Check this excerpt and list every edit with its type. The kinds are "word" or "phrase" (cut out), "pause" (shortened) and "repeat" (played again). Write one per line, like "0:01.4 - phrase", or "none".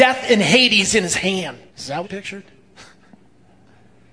0:01.7 - pause
0:02.0 - word

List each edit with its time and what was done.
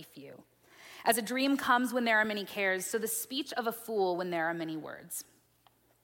none

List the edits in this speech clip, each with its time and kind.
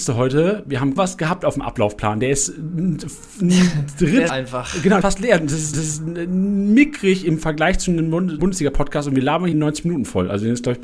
0:01.0 - word
0:04.3 - word
0:05.0 - word
0:05.7 - repeat
0:08.4 - word
0:09.5 - phrase

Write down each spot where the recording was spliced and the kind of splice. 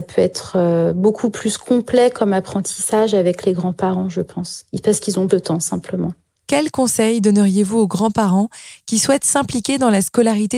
0:05.3 - word

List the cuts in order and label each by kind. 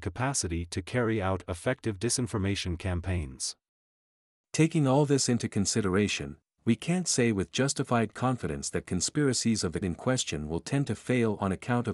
0:09.8 - word

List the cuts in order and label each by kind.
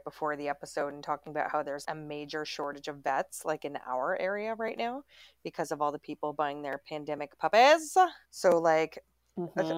0:01.8 - word
0:08.2 - pause

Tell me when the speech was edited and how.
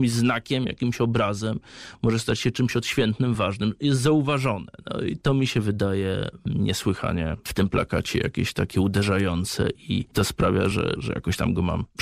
none

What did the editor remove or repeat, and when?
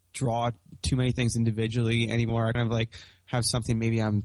0:02.5 - word

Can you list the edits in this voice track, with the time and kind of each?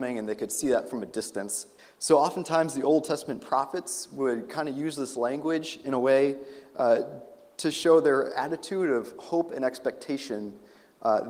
0:01.8 - pause

